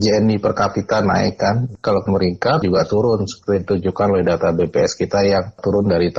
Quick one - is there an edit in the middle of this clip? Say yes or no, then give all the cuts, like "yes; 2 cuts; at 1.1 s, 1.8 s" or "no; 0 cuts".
yes; 2 cuts; at 2.1 s, 2.6 s